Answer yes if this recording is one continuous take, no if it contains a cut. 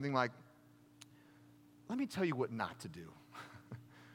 yes